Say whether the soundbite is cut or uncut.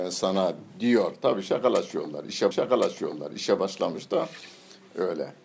cut